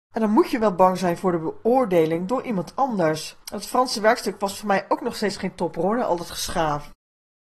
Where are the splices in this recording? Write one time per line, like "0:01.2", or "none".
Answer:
0:03.4